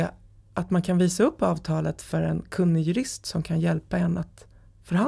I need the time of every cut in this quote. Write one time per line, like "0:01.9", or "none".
none